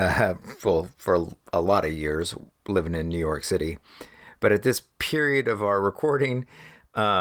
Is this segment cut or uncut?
uncut